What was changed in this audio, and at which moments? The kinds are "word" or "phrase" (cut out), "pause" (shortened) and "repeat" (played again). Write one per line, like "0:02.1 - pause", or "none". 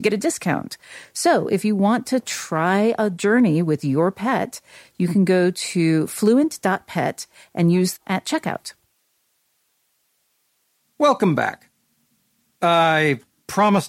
0:08.0 - phrase